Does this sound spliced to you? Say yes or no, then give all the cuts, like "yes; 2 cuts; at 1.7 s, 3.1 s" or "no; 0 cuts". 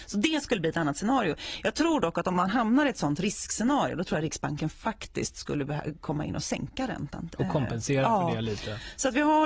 no; 0 cuts